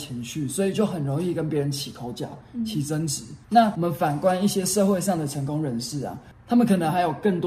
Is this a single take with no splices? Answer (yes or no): no